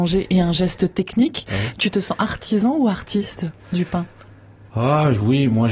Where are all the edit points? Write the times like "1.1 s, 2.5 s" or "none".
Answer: 3.6 s, 4.7 s